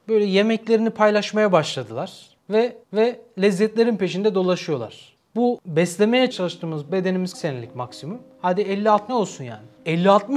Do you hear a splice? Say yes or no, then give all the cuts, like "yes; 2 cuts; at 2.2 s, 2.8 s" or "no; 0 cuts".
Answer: yes; 4 cuts; at 2.8 s, 6.3 s, 7.3 s, 9.1 s